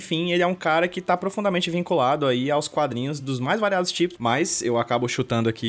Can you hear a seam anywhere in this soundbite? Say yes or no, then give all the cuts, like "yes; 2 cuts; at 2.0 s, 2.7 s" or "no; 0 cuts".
no; 0 cuts